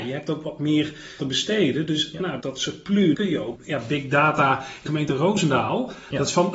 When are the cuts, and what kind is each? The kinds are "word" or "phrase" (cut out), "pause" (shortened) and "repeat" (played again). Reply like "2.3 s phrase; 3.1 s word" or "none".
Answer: 1.2 s word; 2.4 s word; 3.1 s word; 3.6 s word; 4.9 s word